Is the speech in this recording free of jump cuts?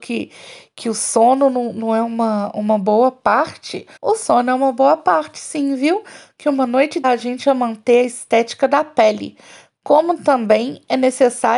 no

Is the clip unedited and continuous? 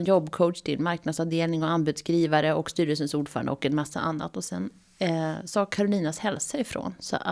yes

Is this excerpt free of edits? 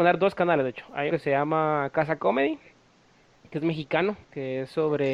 no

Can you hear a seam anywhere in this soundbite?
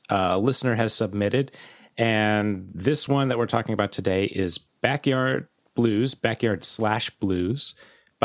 no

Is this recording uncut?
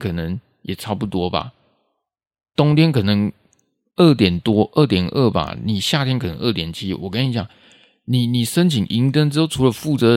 yes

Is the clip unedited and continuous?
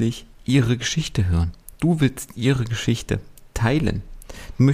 yes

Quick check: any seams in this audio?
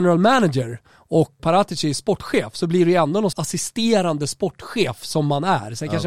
yes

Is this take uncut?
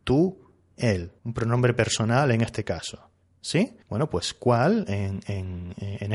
no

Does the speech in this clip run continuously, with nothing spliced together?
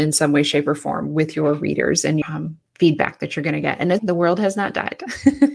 no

